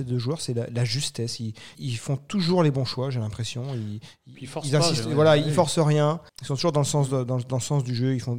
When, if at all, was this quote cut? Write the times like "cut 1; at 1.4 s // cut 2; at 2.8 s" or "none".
cut 1; at 1.7 s // cut 2; at 6.3 s

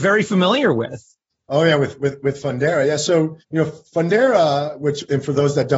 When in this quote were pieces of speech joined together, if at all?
cut 1; at 1.3 s // cut 2; at 3.4 s

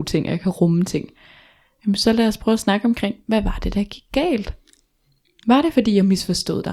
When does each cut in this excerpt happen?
none

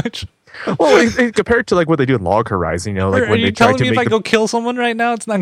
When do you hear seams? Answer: cut 1; at 1.3 s

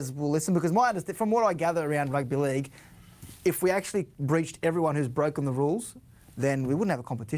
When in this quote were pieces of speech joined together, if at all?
cut 1; at 4.1 s

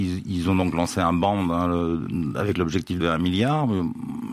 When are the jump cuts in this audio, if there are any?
cut 1; at 3.0 s

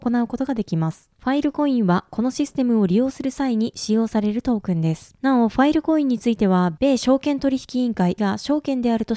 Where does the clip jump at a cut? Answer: cut 1; at 8.2 s

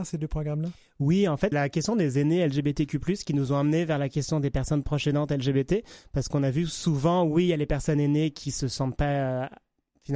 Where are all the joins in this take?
cut 1; at 1.5 s

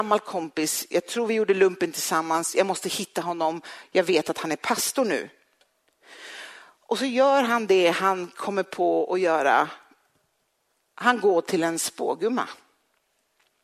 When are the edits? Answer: none

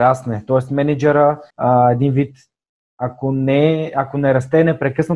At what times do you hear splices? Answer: cut 1; at 1.5 s

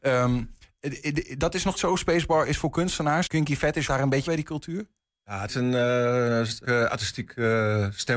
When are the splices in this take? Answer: cut 1; at 1.7 s // cut 2; at 3.3 s // cut 3; at 3.9 s // cut 4; at 4.3 s // cut 5; at 5.5 s // cut 6; at 6.6 s

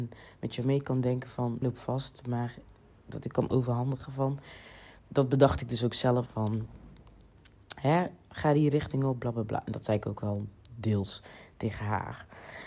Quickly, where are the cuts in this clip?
cut 1; at 1.6 s // cut 2; at 5.0 s // cut 3; at 6.3 s

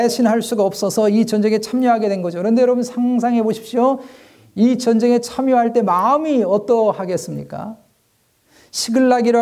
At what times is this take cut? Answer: none

